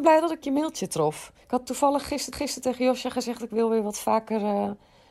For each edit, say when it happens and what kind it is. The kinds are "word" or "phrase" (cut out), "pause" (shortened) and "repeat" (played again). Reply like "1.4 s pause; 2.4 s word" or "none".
1.4 s pause; 2.3 s repeat